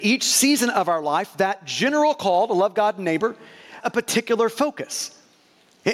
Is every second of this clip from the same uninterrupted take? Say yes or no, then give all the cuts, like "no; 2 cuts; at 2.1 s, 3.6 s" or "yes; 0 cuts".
no; 1 cut; at 3.8 s